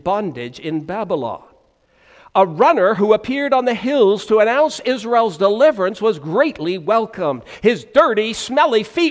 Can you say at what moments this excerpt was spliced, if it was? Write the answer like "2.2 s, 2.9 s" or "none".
none